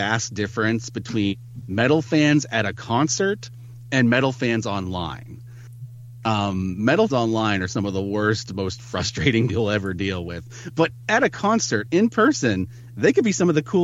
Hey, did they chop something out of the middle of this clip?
yes; 2 cuts; at 7.1 s, 9.5 s

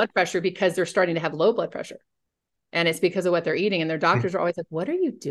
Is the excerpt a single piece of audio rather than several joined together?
yes; 0 cuts

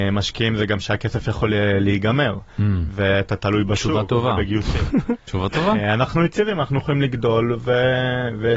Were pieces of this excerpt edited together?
no; 0 cuts

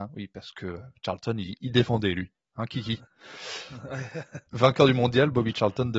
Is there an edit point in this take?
no; 0 cuts

